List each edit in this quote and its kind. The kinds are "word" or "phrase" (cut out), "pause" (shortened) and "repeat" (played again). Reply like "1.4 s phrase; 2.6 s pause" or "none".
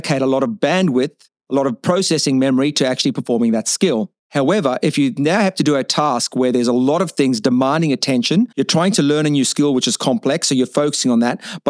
4.2 s pause; 8.5 s pause